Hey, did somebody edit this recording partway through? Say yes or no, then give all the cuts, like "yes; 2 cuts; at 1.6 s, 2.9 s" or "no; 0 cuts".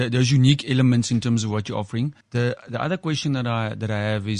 yes; 1 cut; at 2.2 s